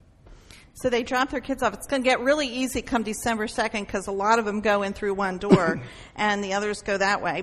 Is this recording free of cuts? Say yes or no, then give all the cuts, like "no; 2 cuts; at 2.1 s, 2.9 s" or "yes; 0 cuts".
yes; 0 cuts